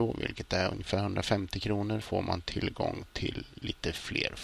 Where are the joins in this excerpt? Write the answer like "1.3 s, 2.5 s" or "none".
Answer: 2.0 s